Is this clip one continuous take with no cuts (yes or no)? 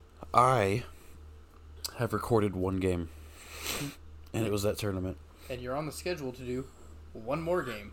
yes